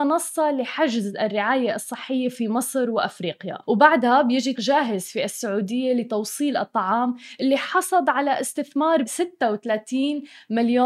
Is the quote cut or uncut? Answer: cut